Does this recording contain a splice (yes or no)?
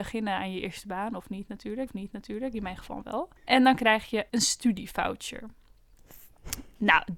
yes